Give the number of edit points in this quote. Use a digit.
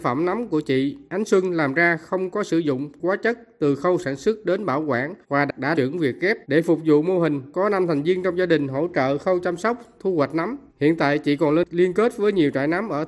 4